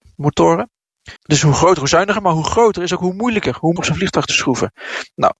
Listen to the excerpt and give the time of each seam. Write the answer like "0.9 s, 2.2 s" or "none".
1.2 s, 3.8 s